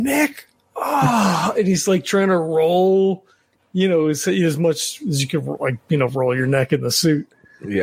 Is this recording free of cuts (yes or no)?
yes